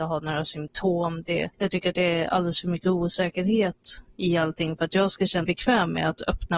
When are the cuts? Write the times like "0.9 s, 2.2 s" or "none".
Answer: 1.5 s, 5.4 s